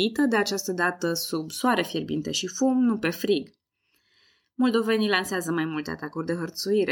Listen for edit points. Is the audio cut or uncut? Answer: uncut